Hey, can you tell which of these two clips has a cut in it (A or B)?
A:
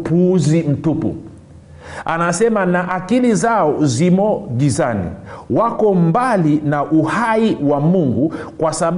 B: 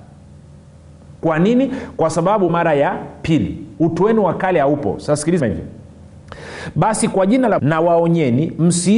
B